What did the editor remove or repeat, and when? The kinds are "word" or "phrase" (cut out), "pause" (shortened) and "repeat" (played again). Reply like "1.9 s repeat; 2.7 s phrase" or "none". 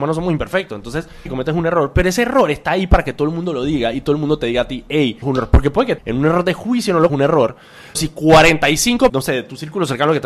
1.3 s word; 5.2 s word; 6.0 s word; 7.1 s word; 7.9 s word; 9.1 s word